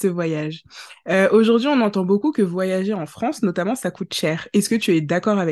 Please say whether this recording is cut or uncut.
uncut